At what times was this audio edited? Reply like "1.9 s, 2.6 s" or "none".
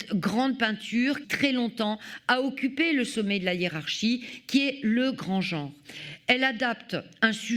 1.2 s